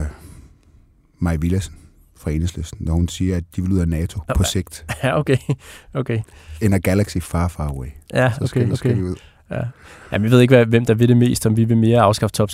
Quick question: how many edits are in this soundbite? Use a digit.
2